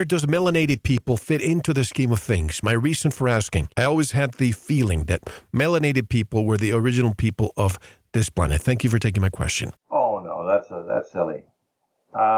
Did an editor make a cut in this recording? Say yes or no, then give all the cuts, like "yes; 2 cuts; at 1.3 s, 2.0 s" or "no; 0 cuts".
yes; 2 cuts; at 3.7 s, 9.8 s